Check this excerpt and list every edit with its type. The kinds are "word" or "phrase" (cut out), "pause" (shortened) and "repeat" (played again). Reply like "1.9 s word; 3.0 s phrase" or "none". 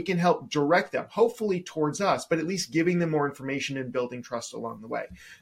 none